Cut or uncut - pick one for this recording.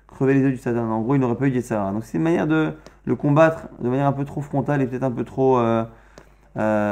uncut